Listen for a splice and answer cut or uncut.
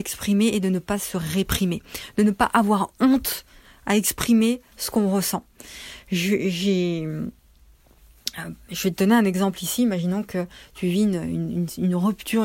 uncut